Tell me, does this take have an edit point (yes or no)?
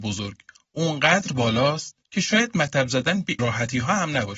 yes